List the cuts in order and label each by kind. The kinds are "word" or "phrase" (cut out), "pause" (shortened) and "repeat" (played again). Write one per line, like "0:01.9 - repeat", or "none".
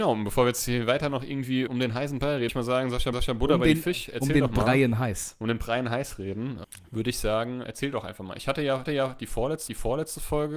0:01.7 - word
0:02.5 - word
0:03.1 - repeat
0:06.6 - word
0:07.6 - word
0:08.9 - repeat
0:09.7 - repeat